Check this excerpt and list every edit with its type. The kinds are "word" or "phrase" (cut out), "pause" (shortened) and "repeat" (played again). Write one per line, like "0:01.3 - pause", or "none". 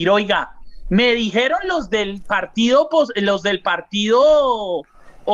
none